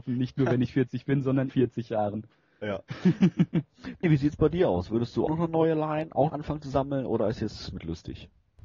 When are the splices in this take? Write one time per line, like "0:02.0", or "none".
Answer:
0:01.5
0:04.0
0:05.3
0:06.3
0:07.7